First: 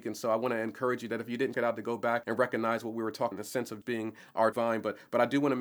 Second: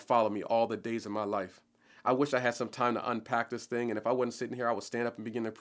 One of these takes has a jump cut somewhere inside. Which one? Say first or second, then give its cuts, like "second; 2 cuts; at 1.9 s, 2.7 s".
first; 5 cuts; at 1.5 s, 2.2 s, 3.3 s, 3.8 s, 4.5 s